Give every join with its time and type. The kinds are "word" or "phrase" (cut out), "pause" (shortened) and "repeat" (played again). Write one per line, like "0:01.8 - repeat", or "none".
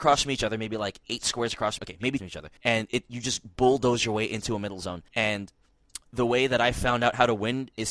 0:01.8 - phrase
0:02.2 - phrase
0:02.6 - pause
0:05.1 - pause